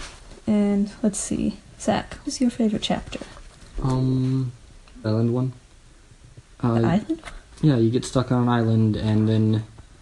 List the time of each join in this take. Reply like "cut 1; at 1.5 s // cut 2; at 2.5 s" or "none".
cut 1; at 2.2 s // cut 2; at 5.0 s